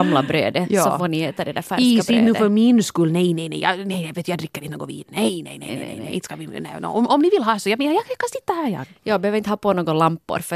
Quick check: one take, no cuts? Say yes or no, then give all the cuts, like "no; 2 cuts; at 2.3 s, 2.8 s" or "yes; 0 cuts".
yes; 0 cuts